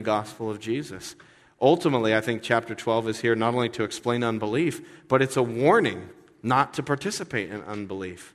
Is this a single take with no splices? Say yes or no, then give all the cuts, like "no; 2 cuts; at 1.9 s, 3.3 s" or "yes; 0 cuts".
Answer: yes; 0 cuts